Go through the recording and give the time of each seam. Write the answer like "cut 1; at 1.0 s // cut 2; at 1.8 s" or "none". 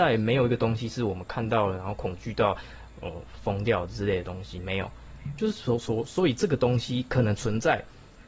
none

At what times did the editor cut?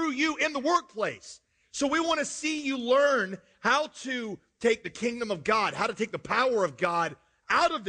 none

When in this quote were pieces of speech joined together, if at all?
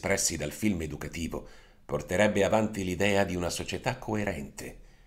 none

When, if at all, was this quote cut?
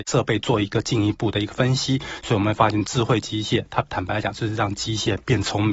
cut 1; at 2.8 s

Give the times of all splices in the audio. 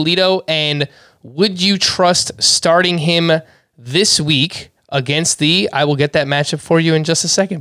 none

